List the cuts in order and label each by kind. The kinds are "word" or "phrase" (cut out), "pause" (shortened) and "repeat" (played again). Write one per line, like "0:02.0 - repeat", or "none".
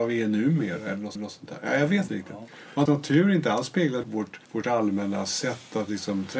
0:01.2 - repeat
0:02.1 - word
0:02.9 - word
0:04.0 - word
0:04.4 - pause